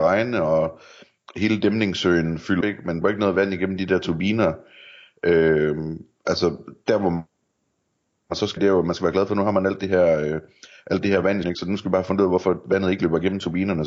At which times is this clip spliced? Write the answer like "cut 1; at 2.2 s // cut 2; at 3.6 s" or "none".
cut 1; at 2.6 s // cut 2; at 3.0 s // cut 3; at 8.6 s // cut 4; at 11.4 s